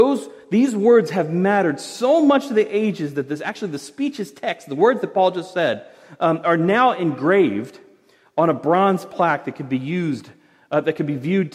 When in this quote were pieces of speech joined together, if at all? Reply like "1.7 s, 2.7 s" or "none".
none